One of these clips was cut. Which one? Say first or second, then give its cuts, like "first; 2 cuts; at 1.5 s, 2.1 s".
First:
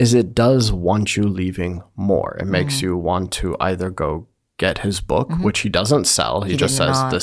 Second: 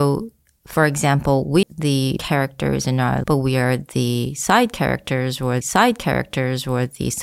second; 4 cuts; at 1.6 s, 2.2 s, 3.2 s, 5.6 s